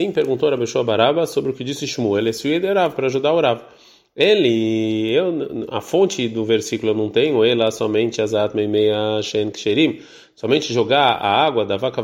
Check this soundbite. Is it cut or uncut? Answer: uncut